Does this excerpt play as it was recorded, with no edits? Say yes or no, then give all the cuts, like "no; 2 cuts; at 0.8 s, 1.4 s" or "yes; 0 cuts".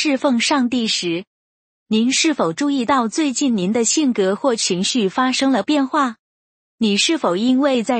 yes; 0 cuts